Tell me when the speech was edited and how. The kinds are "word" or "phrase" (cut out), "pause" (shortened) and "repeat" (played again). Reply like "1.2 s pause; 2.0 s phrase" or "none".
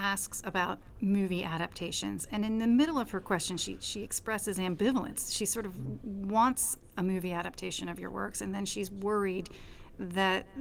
none